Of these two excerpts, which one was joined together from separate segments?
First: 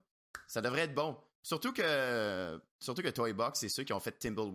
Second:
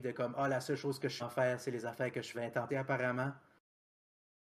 second; 3 cuts; at 1.2 s, 2.3 s, 2.7 s

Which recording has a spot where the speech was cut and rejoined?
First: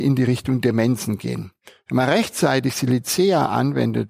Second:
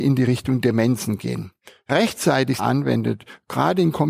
second; 2 cuts; at 1.9 s, 2.6 s

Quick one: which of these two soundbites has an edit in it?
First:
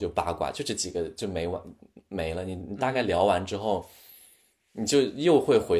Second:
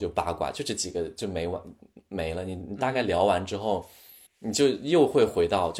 second; 1 cut; at 4.3 s

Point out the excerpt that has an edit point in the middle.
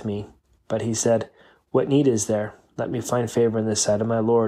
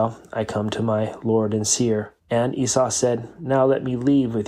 second; 1 cut; at 2.2 s

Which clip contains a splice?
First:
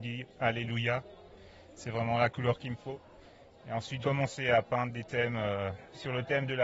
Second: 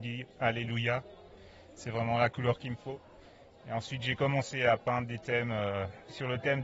first; 1 cut; at 4.0 s

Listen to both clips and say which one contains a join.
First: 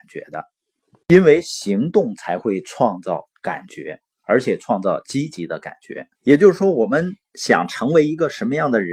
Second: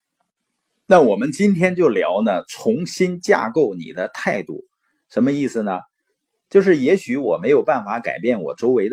first; 1 cut; at 6.1 s

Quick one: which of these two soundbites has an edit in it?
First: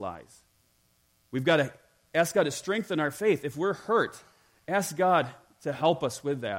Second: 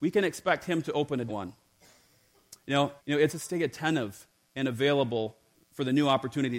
second; 4 cuts; at 1.3 s, 3.0 s, 3.3 s, 5.5 s

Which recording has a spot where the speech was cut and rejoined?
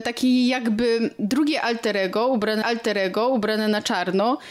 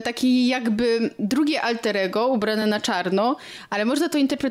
first; 1 cut; at 2.6 s

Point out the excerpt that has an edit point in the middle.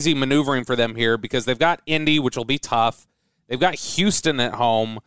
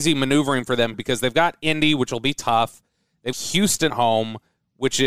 second; 3 cuts; at 0.9 s, 3.3 s, 3.9 s

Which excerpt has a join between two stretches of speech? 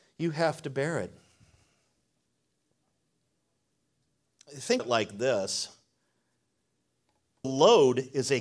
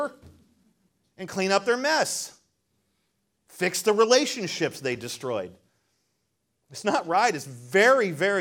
first; 2 cuts; at 4.8 s, 7.4 s

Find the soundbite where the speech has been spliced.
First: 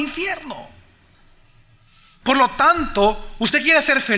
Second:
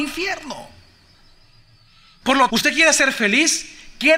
second; 1 cut; at 2.5 s

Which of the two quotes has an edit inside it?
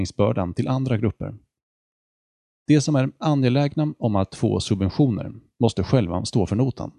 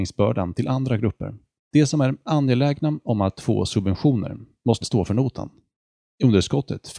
second; 2 cuts; at 1.6 s, 4.8 s

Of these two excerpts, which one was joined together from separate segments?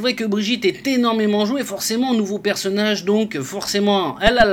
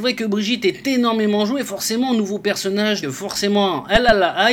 second; 1 cut; at 3.0 s

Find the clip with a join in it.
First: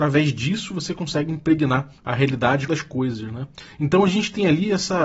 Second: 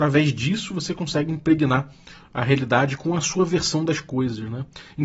first; 2 cuts; at 2.0 s, 2.7 s

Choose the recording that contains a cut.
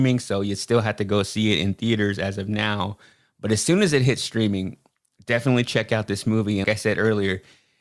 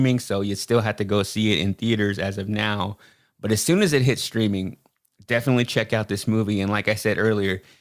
first; 1 cut; at 6.6 s

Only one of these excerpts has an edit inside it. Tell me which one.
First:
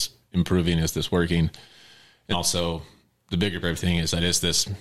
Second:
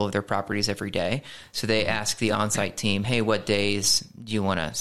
first; 3 cuts; at 2.3 s, 3.0 s, 3.6 s

